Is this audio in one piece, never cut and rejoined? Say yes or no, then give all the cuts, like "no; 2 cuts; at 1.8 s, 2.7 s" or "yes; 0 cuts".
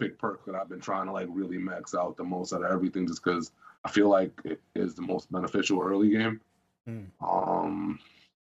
no; 2 cuts; at 3.7 s, 7.1 s